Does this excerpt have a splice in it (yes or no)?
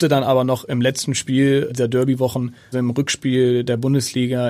yes